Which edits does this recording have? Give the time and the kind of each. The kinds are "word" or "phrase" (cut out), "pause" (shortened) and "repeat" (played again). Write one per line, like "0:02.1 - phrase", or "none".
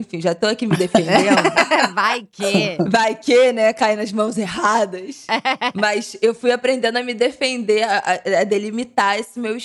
none